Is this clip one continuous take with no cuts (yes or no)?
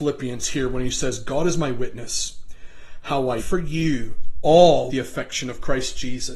no